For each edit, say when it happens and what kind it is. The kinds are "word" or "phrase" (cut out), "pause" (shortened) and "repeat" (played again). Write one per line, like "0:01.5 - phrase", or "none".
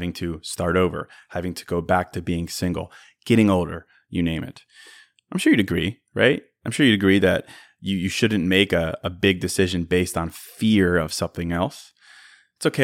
none